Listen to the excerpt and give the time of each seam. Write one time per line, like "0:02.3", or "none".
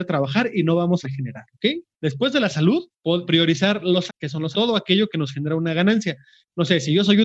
0:01.0
0:03.2
0:04.1
0:04.5

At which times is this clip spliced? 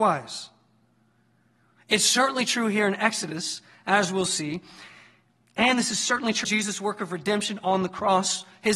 0:06.4

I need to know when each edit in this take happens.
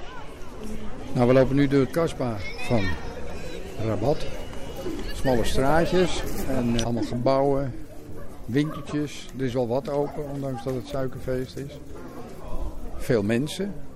0:01.8
0:06.8

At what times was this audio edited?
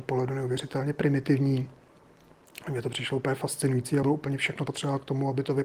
0:04.0
0:04.7

